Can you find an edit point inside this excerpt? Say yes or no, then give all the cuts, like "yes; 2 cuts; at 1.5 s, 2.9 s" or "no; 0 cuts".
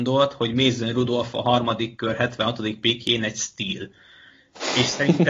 no; 0 cuts